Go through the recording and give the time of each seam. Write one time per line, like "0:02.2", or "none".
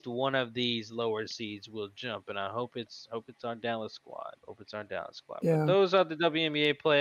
0:04.4

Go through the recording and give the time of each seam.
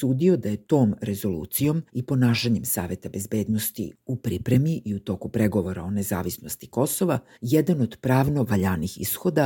0:01.9
0:07.3

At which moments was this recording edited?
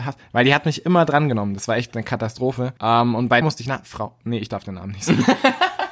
0:02.8
0:03.4

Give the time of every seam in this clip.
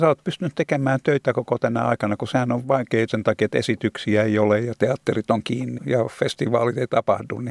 0:03.1
0:05.8

